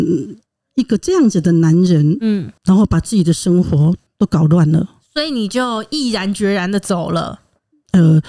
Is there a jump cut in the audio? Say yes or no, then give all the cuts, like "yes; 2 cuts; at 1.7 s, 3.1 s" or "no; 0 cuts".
yes; 1 cut; at 2.6 s